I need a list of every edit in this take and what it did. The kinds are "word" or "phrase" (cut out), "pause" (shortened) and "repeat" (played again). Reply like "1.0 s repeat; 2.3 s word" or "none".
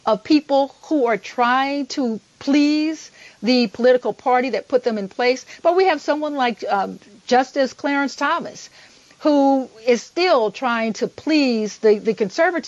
none